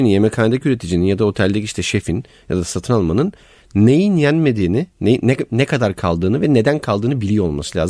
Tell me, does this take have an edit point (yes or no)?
no